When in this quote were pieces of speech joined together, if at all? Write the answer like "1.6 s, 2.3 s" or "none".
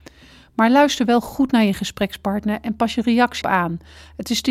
3.4 s